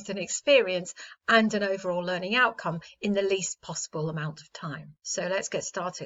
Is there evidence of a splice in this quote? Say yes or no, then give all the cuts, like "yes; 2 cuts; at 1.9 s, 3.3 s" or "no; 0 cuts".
no; 0 cuts